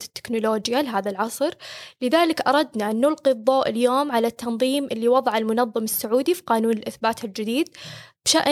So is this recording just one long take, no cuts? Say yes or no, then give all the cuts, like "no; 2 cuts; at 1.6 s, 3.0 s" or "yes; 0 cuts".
yes; 0 cuts